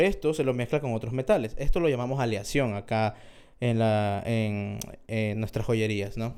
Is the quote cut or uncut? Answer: uncut